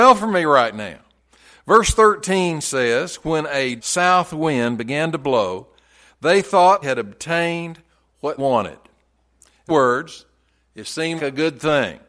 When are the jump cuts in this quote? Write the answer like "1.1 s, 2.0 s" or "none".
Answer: 3.8 s, 6.8 s, 8.4 s, 9.7 s, 11.2 s